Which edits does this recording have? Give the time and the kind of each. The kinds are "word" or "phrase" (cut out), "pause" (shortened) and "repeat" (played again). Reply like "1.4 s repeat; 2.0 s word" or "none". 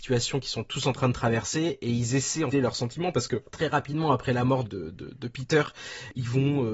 2.5 s phrase; 3.5 s pause; 4.7 s word